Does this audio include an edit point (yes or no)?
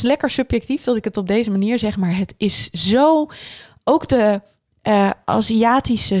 no